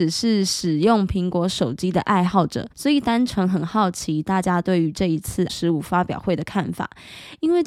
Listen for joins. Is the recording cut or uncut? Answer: cut